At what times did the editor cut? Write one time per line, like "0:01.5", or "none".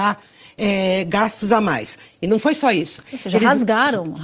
none